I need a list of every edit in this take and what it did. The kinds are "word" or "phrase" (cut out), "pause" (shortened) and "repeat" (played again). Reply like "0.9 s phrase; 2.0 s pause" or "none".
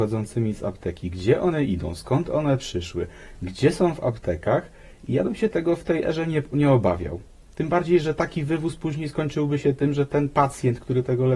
none